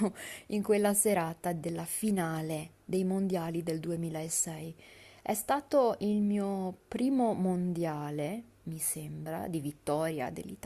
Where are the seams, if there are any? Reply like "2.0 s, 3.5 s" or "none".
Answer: none